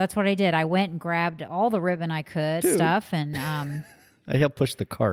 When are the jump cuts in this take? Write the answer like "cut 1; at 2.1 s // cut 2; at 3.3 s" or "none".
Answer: cut 1; at 2.6 s

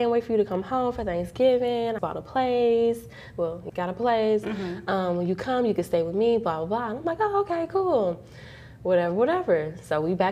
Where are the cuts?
cut 1; at 2.0 s // cut 2; at 3.7 s

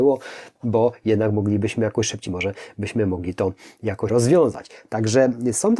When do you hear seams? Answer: cut 1; at 2.3 s // cut 2; at 4.1 s

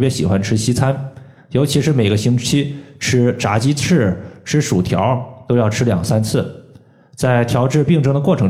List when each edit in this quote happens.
none

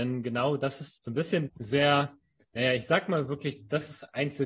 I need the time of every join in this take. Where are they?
cut 1; at 1.0 s // cut 2; at 1.5 s

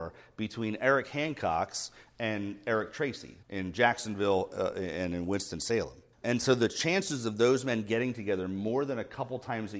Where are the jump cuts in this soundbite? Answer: cut 1; at 3.4 s // cut 2; at 6.1 s

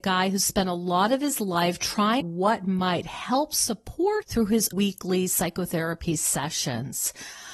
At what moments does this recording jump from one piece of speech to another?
cut 1; at 2.2 s // cut 2; at 4.2 s // cut 3; at 4.7 s

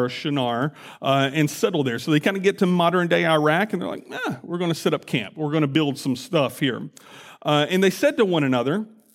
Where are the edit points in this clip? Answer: none

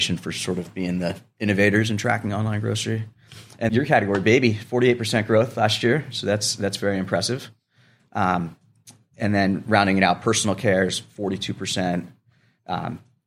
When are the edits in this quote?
cut 1; at 3.7 s

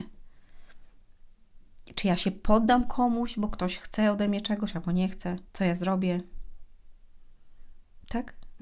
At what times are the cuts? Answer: cut 1; at 5.5 s

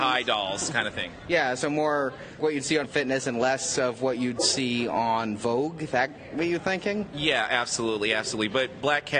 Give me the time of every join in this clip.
cut 1; at 2.4 s // cut 2; at 2.8 s

